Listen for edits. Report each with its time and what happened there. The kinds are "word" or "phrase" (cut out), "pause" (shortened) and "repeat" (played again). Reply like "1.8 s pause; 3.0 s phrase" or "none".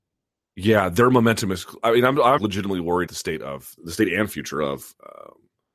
2.4 s word; 3.1 s word; 3.8 s phrase